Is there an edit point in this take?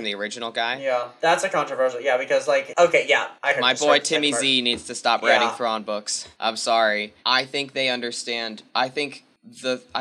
yes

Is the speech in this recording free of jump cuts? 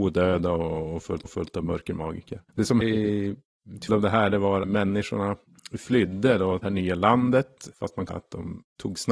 no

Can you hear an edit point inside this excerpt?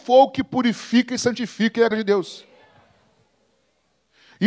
yes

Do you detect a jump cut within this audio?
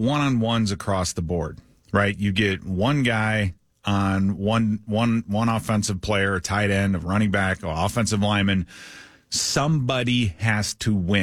no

